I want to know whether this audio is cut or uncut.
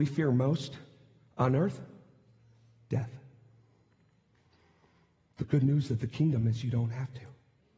uncut